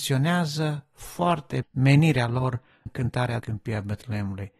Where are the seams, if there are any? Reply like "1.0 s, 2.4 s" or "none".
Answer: 1.6 s, 2.9 s, 3.4 s